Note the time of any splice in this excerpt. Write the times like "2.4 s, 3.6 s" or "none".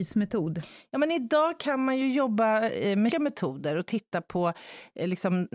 3.1 s